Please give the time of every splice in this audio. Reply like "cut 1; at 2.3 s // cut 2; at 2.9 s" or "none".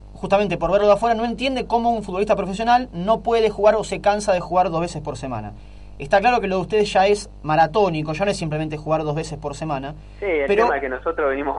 none